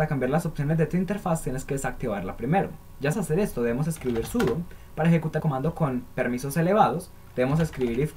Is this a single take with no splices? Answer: no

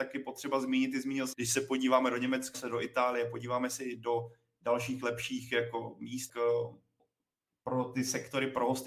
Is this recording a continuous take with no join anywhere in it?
no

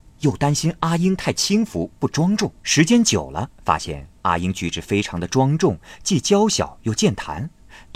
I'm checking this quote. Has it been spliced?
yes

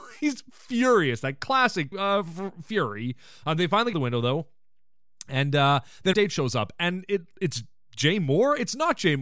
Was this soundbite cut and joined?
yes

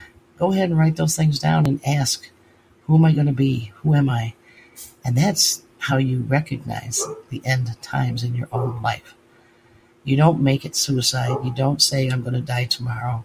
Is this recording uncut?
yes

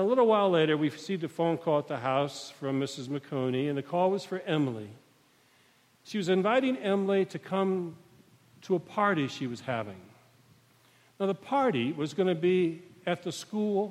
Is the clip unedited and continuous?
yes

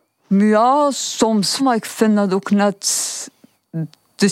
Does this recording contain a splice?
yes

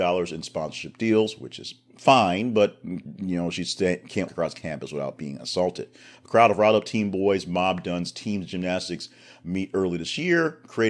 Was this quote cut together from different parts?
yes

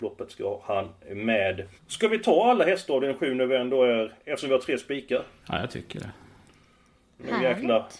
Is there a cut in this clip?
yes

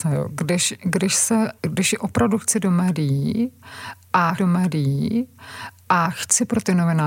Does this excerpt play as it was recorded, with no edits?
no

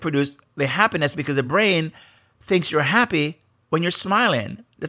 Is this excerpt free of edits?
yes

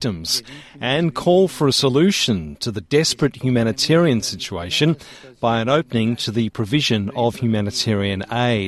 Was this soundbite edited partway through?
no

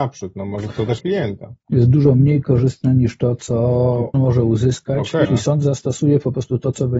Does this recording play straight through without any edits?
no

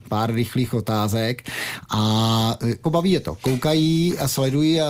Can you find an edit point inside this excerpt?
yes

